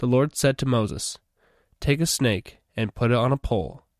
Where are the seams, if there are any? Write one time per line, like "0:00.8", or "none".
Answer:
none